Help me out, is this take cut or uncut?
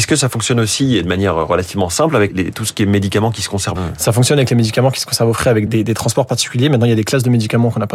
cut